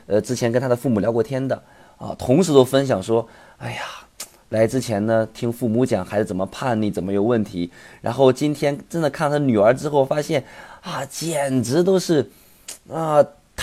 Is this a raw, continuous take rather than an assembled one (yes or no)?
yes